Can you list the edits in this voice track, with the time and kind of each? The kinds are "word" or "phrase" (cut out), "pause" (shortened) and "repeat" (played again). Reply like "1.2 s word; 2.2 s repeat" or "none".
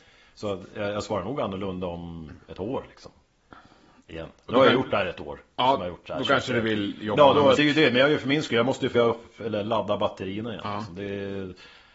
7.6 s word; 8.9 s word